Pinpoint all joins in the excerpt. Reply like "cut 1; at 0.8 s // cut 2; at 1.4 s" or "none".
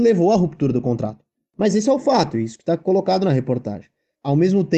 none